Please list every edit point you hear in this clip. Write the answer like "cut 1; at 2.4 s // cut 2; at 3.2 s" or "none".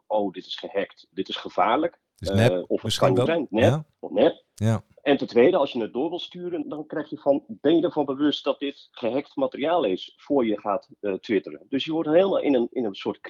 cut 1; at 1.1 s // cut 2; at 3.3 s // cut 3; at 3.9 s // cut 4; at 4.5 s // cut 5; at 6.6 s